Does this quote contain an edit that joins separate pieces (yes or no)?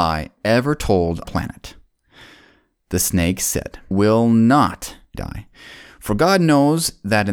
yes